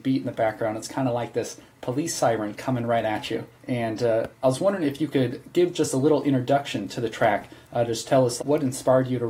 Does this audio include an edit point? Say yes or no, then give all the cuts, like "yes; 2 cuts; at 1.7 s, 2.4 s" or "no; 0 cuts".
yes; 3 cuts; at 3.5 s, 4.3 s, 8.4 s